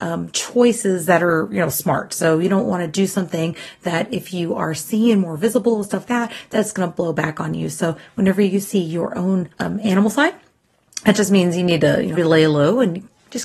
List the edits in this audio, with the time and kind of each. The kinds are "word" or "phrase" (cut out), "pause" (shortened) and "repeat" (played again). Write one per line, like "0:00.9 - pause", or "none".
0:06.0 - word
0:09.5 - pause
0:12.2 - word